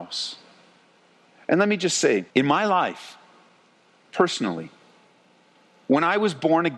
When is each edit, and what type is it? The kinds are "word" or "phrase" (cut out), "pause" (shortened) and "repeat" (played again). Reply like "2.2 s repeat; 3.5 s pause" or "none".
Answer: 2.3 s pause